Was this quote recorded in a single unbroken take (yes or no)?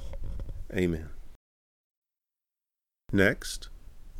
yes